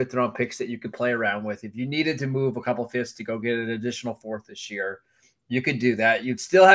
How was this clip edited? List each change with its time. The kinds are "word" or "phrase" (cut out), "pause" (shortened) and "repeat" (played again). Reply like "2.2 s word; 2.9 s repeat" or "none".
none